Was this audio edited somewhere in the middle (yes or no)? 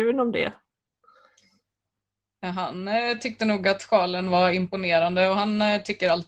no